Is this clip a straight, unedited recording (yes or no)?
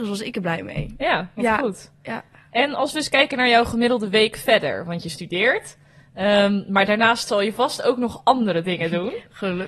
no